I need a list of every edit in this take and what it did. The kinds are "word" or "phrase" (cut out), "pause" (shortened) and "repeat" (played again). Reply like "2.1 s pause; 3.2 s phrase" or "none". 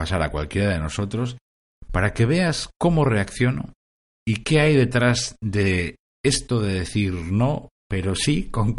none